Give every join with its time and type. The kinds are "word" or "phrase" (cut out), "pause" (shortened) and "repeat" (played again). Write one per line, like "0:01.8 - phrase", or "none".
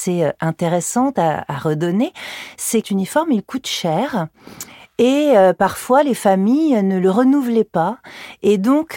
0:02.8 - phrase